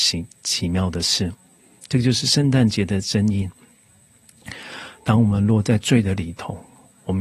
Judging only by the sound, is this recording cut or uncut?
uncut